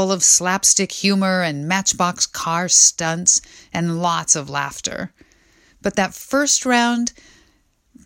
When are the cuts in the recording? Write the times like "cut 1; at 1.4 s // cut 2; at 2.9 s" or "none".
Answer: none

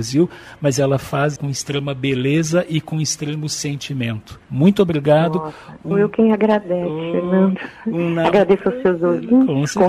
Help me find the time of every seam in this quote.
cut 1; at 1.4 s // cut 2; at 4.4 s // cut 3; at 5.9 s

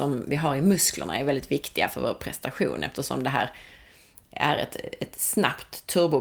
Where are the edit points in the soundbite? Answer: none

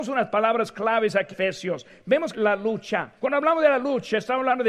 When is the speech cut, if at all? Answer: cut 1; at 1.3 s // cut 2; at 2.3 s // cut 3; at 3.2 s

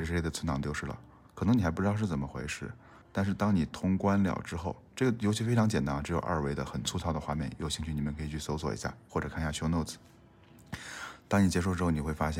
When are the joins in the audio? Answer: cut 1; at 3.0 s

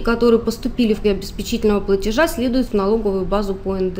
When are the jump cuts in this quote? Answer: cut 1; at 1.0 s // cut 2; at 2.7 s

